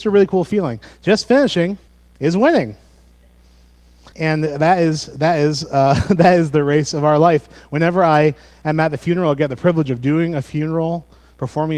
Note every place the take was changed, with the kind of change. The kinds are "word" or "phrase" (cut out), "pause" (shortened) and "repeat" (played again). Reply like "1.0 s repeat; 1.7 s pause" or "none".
1.9 s pause; 4.1 s pause